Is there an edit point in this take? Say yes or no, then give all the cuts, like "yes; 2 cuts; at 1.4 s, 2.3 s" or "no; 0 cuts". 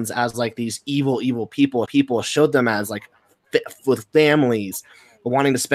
yes; 1 cut; at 1.8 s